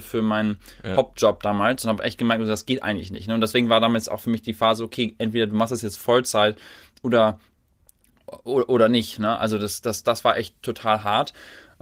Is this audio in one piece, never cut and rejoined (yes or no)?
yes